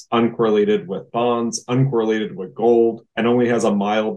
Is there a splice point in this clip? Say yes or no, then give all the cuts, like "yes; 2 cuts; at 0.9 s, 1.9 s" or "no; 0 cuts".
no; 0 cuts